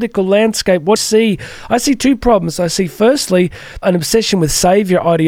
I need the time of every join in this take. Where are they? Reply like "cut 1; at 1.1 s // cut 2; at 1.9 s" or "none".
cut 1; at 1.0 s // cut 2; at 3.8 s